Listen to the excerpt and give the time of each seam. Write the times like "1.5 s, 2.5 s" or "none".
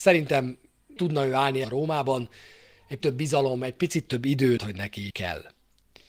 1.0 s, 1.6 s, 3.0 s, 4.6 s, 5.1 s